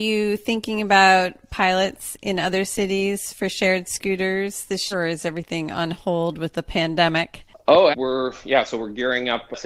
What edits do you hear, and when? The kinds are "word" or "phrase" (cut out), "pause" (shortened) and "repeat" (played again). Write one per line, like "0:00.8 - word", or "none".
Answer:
0:04.9 - word
0:07.9 - word